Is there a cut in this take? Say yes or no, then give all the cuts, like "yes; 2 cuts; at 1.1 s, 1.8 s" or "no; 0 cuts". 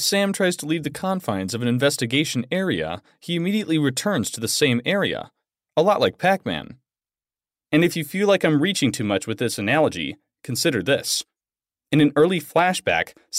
no; 0 cuts